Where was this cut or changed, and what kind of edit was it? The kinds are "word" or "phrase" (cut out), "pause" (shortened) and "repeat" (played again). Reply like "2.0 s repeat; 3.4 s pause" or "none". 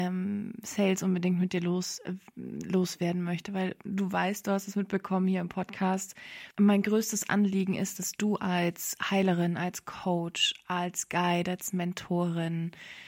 6.5 s pause